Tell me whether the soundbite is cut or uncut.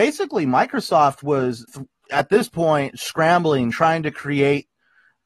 cut